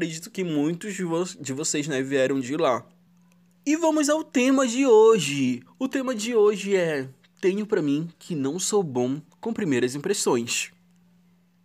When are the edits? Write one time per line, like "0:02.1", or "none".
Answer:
0:03.1